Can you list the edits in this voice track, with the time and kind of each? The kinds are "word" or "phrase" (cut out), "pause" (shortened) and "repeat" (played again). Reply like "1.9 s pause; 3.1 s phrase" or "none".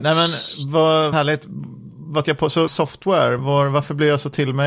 1.1 s word; 2.2 s word; 2.7 s word; 3.4 s word